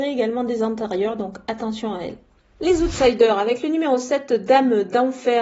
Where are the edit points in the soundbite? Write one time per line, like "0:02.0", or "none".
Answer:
none